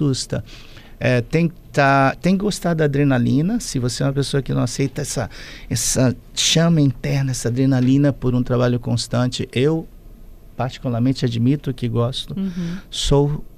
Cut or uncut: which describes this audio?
uncut